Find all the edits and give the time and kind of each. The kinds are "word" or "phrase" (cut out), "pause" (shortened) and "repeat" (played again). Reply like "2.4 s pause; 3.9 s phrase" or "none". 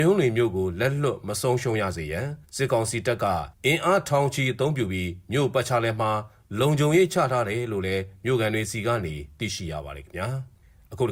2.4 s pause; 3.5 s pause